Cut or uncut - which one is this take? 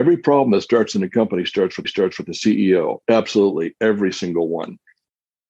cut